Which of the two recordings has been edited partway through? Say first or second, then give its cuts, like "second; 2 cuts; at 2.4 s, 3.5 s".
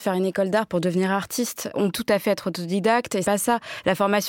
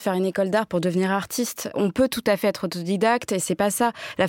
first; 2 cuts; at 1.9 s, 3.2 s